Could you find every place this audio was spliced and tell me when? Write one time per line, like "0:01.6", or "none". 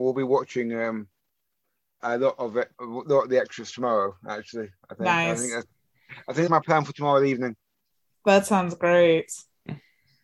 0:02.0
0:02.7
0:06.5